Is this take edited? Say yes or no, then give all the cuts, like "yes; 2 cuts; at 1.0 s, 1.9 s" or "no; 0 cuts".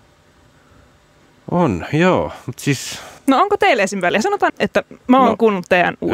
yes; 2 cuts; at 3.2 s, 4.5 s